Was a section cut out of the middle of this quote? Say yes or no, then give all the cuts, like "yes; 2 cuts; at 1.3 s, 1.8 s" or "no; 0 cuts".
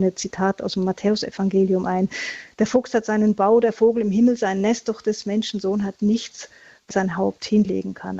yes; 1 cut; at 6.9 s